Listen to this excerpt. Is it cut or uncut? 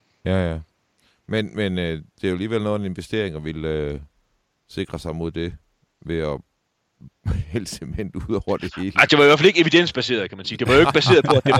uncut